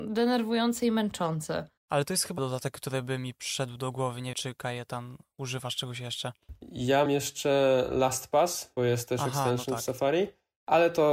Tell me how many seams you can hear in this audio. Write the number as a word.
five